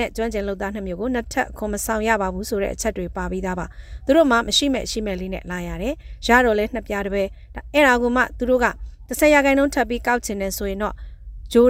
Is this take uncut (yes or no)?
yes